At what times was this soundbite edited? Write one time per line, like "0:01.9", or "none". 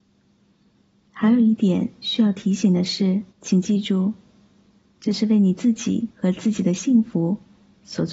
0:03.3
0:06.1